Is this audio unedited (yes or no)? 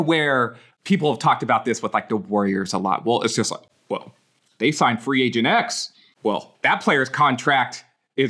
yes